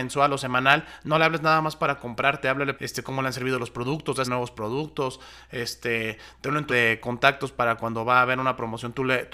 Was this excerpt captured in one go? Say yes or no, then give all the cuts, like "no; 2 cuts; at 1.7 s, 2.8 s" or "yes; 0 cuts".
no; 3 cuts; at 2.8 s, 4.2 s, 6.7 s